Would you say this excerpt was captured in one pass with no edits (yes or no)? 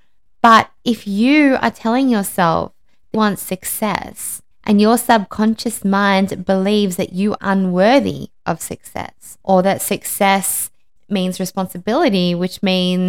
no